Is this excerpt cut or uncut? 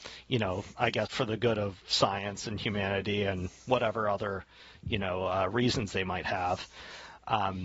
cut